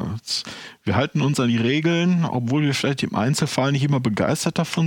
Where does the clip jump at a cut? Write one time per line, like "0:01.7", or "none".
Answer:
none